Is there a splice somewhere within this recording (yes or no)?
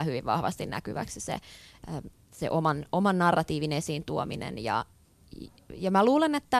no